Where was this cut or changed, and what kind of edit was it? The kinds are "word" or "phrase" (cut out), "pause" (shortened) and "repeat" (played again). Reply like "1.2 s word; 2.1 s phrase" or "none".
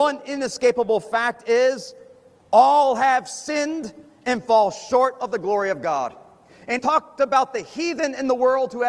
6.8 s word